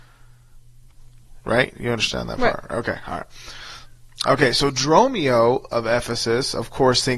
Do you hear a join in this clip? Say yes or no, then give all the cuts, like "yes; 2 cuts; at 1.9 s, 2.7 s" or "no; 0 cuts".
no; 0 cuts